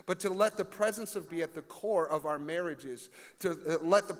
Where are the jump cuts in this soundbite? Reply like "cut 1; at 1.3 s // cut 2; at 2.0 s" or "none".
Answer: cut 1; at 1.3 s